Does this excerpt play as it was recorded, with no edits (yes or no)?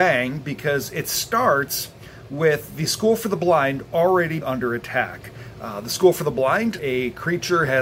no